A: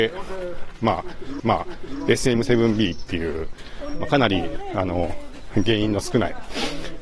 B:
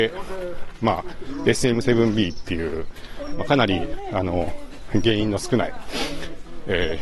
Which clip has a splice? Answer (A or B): A